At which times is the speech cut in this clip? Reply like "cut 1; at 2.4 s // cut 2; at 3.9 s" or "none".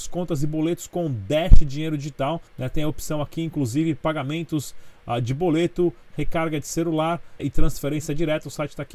cut 1; at 2.5 s // cut 2; at 7.4 s